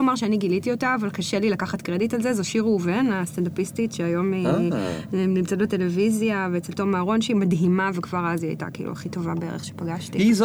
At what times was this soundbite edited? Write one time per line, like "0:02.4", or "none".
none